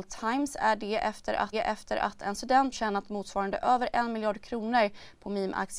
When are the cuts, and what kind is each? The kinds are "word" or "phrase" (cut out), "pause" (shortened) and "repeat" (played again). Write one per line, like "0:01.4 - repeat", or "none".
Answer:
0:01.5 - repeat
0:02.7 - word